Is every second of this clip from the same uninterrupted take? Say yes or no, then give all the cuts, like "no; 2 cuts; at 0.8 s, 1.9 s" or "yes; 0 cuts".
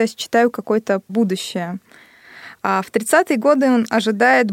no; 1 cut; at 1.1 s